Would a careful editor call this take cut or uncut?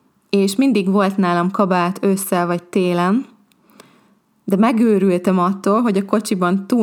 uncut